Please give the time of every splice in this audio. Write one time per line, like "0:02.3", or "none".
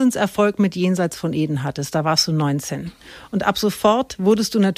none